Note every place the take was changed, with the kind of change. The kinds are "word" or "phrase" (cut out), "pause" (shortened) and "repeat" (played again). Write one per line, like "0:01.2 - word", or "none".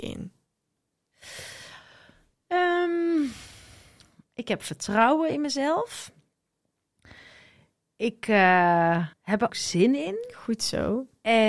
0:09.1 - pause
0:09.5 - word